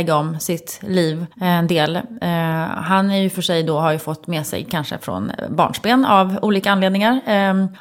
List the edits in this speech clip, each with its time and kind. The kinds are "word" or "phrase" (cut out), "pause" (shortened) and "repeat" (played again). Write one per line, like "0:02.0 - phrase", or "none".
0:01.3 - pause